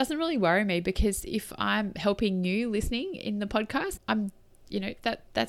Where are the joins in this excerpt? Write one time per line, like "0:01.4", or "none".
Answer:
0:04.0